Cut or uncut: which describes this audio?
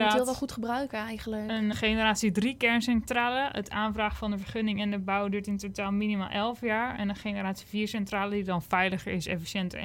cut